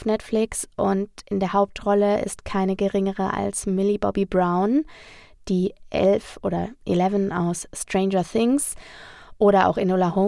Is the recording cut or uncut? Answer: uncut